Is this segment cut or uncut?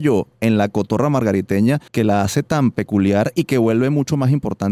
cut